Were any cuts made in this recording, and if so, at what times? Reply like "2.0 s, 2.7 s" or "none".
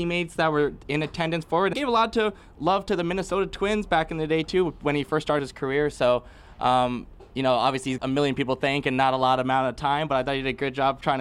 1.7 s, 5.4 s, 8.0 s